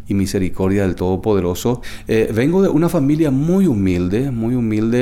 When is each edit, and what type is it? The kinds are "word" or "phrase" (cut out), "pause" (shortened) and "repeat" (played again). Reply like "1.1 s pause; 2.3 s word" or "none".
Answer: none